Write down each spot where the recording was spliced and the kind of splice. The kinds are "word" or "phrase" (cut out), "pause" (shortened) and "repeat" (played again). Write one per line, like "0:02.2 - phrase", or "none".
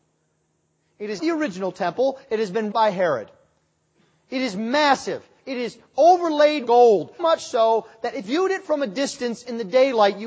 0:01.2 - word
0:02.7 - word
0:06.7 - word
0:07.2 - word
0:08.2 - word